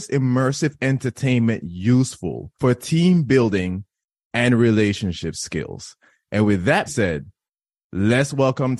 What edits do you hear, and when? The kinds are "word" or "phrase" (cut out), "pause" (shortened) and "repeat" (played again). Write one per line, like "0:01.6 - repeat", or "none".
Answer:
0:02.5 - pause
0:06.9 - word